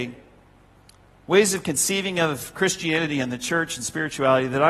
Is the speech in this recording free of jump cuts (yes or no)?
yes